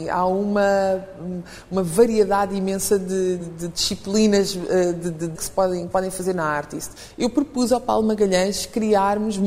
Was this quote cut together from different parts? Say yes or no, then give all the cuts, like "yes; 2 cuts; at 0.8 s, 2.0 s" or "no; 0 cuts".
yes; 3 cuts; at 3.4 s, 5.3 s, 5.9 s